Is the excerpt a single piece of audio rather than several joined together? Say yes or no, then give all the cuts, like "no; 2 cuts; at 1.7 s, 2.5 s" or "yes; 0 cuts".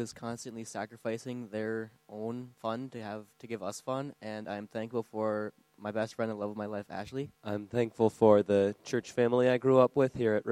no; 3 cuts; at 2.5 s, 3.3 s, 7.3 s